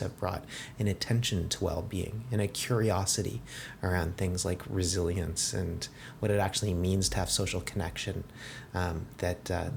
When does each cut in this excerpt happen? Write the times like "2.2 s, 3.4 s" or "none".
none